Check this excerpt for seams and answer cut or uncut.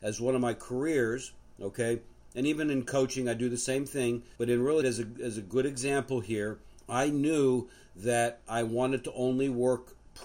cut